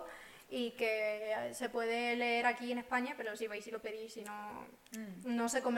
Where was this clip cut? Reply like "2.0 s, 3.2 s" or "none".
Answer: none